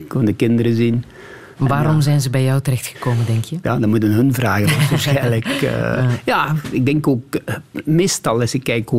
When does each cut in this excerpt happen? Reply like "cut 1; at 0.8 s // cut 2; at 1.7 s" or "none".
cut 1; at 1.5 s